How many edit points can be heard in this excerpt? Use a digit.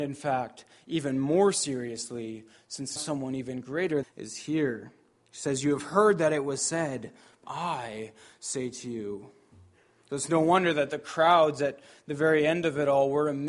3